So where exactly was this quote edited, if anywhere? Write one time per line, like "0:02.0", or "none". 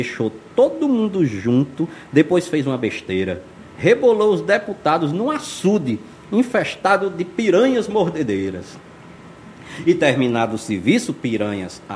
0:03.7